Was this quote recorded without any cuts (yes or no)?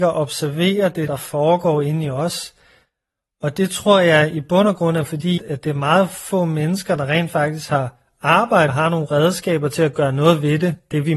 no